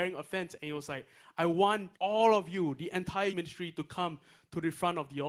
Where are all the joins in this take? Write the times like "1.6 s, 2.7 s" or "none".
1.9 s, 3.3 s